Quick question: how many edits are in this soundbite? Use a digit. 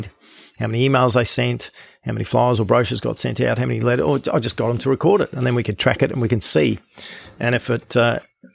0